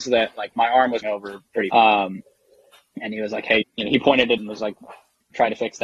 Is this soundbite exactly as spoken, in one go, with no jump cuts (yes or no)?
no